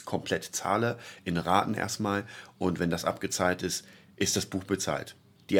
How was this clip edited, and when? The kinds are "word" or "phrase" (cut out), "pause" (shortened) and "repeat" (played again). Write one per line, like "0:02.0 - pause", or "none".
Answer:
none